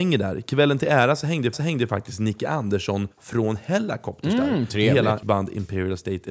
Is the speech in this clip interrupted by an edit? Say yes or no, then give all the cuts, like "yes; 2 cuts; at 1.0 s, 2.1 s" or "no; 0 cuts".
yes; 3 cuts; at 1.5 s, 3.1 s, 5.2 s